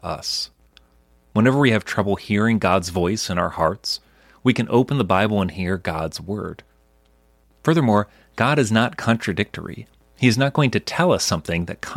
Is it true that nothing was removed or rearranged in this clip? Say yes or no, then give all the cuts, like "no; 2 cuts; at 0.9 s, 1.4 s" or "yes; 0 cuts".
yes; 0 cuts